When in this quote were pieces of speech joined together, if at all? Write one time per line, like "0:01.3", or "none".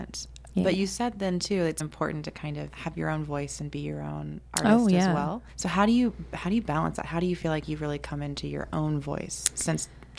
0:01.8
0:02.7
0:05.5